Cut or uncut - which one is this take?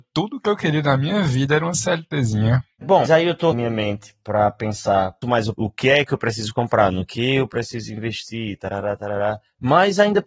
cut